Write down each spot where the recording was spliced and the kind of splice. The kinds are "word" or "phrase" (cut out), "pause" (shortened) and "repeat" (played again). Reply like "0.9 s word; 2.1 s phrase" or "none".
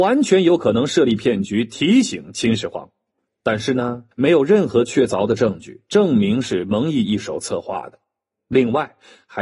4.1 s pause